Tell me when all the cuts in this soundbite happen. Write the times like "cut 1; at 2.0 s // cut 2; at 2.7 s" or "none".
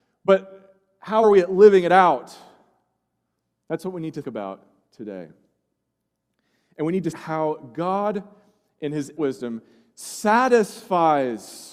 cut 1; at 1.2 s // cut 2; at 4.2 s // cut 3; at 7.1 s // cut 4; at 9.2 s